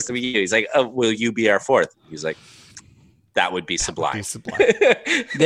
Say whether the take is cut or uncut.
uncut